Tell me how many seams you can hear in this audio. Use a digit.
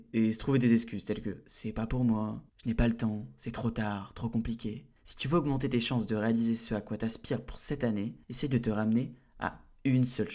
3